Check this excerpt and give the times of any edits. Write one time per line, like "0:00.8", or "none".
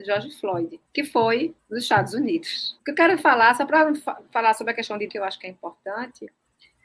0:05.1